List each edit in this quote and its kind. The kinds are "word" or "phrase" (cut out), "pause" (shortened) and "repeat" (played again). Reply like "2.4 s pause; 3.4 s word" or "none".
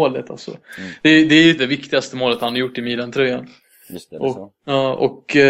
1.6 s word; 4.6 s pause

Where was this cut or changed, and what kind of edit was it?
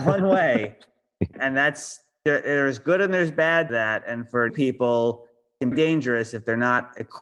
1.3 s word; 3.7 s word; 4.5 s word; 5.7 s phrase

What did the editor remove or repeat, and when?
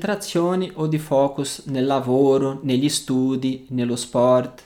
none

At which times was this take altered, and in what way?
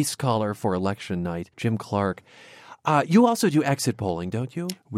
1.5 s pause

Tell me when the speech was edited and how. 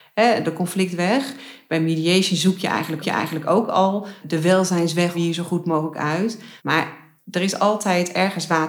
3.0 s repeat; 4.2 s word; 5.1 s phrase; 6.6 s pause

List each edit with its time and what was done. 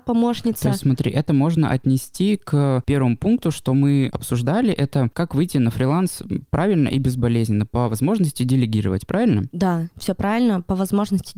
none

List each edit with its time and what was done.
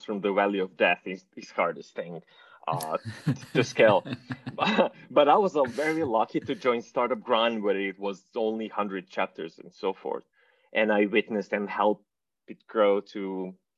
none

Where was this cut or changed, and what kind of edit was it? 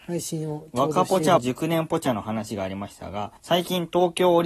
1.4 s word; 3.4 s pause

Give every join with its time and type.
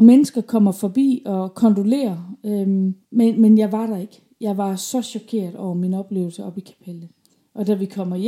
3.0 s pause

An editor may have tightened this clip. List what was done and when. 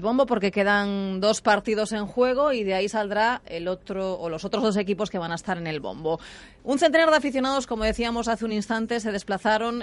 none

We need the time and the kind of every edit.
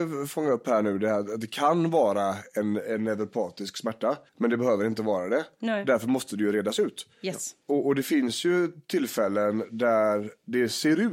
4.3 s pause; 7.1 s pause

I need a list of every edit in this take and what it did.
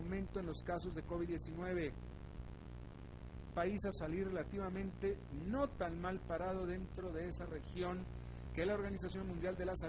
3.5 s phrase; 3.9 s word

